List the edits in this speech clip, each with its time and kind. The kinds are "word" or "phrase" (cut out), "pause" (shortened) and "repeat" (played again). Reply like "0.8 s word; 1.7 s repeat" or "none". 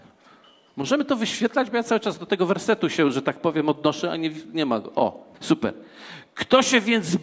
5.3 s pause